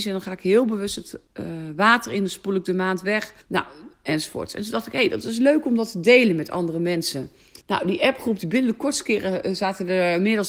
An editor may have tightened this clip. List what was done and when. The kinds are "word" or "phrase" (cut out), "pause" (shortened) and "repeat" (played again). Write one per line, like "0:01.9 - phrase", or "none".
0:01.3 - word
0:03.4 - pause
0:07.6 - pause